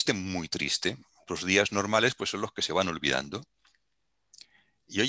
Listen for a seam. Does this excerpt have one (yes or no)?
no